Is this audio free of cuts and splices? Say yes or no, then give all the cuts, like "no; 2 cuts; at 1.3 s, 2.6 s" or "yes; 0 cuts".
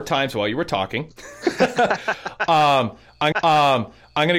no; 2 cuts; at 1.1 s, 3.3 s